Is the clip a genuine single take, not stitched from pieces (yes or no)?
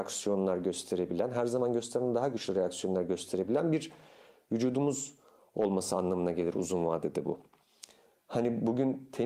yes